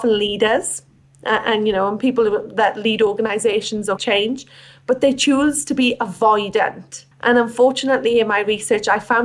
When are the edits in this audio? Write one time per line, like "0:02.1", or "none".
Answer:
0:04.0
0:07.1